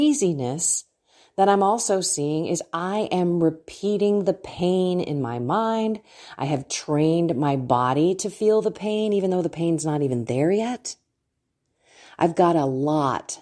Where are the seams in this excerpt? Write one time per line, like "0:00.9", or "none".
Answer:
none